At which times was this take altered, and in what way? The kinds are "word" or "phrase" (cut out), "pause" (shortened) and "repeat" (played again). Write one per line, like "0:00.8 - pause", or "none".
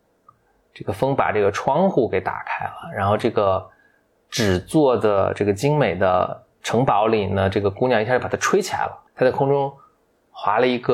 0:09.1 - pause